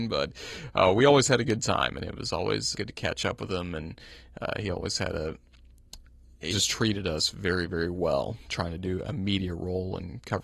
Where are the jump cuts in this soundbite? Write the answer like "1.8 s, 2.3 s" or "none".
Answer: 2.7 s, 6.5 s